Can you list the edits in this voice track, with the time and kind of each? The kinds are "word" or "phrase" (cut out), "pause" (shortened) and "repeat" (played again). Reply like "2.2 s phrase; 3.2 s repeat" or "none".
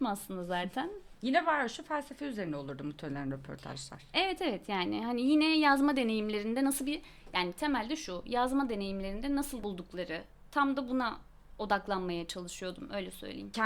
9.6 s phrase